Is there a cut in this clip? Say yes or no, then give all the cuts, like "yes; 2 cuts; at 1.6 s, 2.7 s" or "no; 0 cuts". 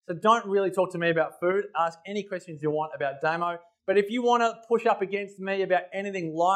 no; 0 cuts